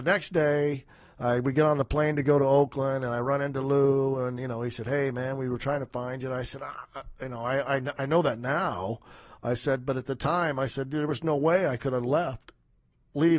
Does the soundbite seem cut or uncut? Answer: uncut